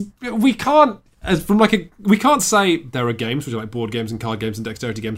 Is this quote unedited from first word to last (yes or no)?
yes